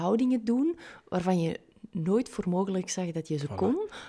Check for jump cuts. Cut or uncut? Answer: uncut